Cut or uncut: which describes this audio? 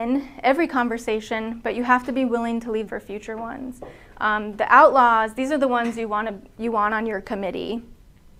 cut